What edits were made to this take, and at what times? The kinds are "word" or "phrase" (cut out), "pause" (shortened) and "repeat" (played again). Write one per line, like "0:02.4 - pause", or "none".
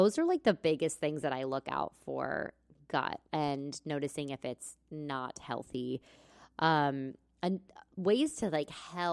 0:03.3 - word